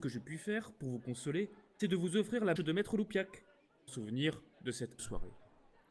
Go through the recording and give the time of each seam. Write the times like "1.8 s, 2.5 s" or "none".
1.8 s, 2.6 s, 3.9 s, 5.0 s